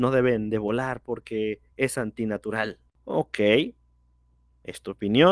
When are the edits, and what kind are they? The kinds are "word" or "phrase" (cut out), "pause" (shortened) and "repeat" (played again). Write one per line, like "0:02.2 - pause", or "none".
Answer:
none

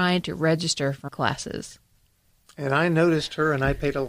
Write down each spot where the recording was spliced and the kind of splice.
0:01.1 - word

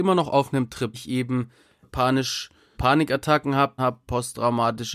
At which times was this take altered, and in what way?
0:00.9 - word
0:01.8 - word
0:02.7 - word
0:03.8 - word

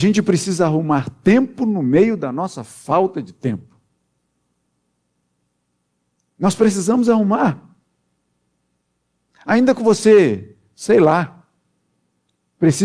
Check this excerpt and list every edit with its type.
none

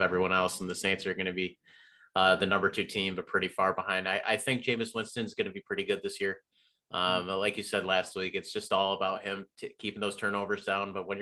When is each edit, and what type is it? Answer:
none

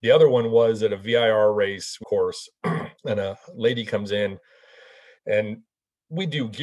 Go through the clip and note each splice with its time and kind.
0:02.0 - phrase
0:03.0 - pause

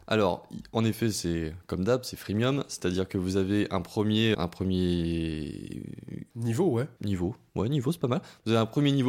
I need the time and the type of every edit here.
0:04.3 - word

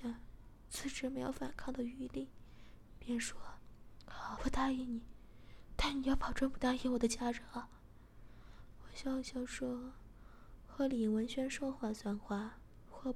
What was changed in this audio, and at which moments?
0:04.4 - word

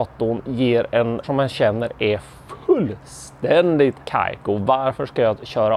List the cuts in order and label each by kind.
0:01.2 - word
0:04.0 - pause

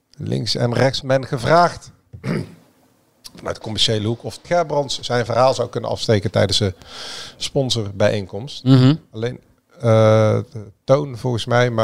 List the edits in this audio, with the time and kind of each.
0:01.0 - word
0:04.4 - word
0:05.0 - word

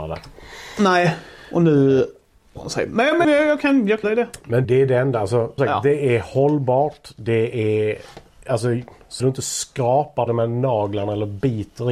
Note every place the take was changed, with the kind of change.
0:02.6 - word
0:03.2 - word
0:04.0 - word
0:04.6 - word
0:05.6 - word
0:09.2 - word
0:10.3 - word

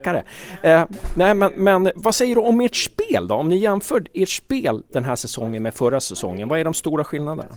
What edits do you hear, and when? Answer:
none

